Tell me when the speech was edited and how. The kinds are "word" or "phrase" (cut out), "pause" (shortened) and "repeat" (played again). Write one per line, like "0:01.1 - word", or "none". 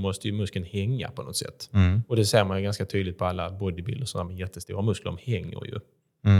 none